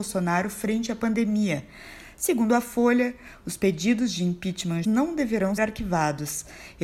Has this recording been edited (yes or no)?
yes